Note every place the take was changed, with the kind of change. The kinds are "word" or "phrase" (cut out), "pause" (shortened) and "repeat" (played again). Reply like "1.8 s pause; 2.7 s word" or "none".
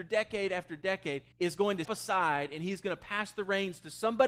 1.3 s pause; 1.8 s word